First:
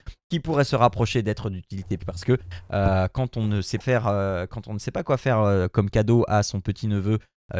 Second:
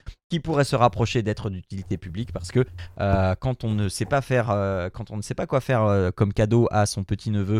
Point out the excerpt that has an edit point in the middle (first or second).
first